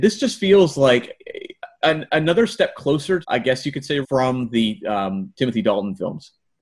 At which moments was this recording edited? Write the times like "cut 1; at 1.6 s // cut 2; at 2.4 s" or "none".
cut 1; at 1.8 s // cut 2; at 3.2 s // cut 3; at 4.0 s // cut 4; at 5.3 s

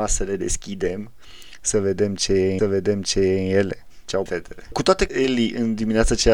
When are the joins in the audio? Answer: cut 1; at 2.6 s // cut 2; at 4.3 s // cut 3; at 5.1 s

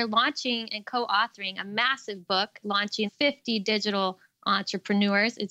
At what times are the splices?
cut 1; at 2.6 s // cut 2; at 3.1 s

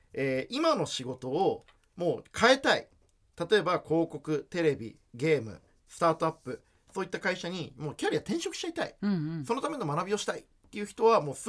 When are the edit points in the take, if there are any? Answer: none

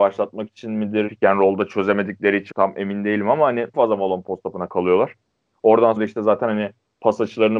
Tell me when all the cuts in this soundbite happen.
cut 1; at 1.1 s // cut 2; at 2.5 s // cut 3; at 3.7 s // cut 4; at 6.0 s

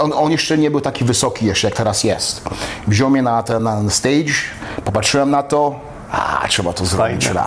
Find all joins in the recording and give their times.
none

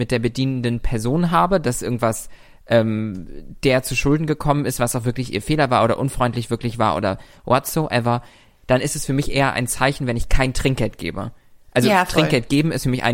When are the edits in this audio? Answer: none

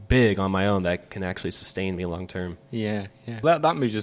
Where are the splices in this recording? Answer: none

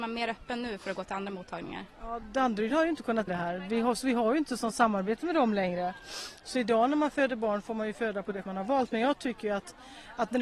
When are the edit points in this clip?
cut 1; at 3.3 s // cut 2; at 8.4 s

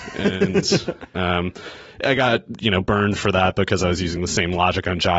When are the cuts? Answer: none

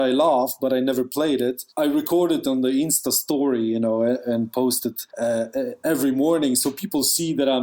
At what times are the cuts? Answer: none

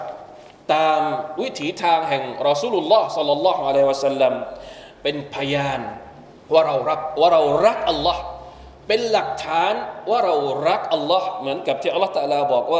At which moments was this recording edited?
cut 1; at 6.3 s

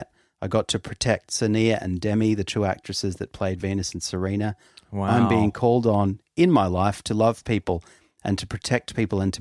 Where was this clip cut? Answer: none

